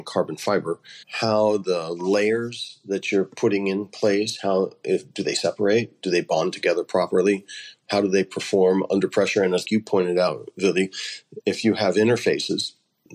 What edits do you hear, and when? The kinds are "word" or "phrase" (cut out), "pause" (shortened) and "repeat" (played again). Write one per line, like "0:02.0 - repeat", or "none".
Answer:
0:01.0 - pause
0:09.6 - word
0:11.4 - word